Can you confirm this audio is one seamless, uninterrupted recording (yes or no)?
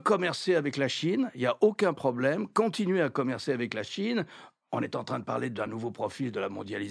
yes